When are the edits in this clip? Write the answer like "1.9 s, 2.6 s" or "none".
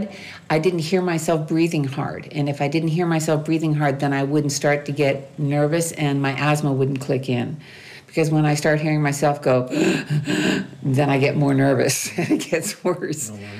none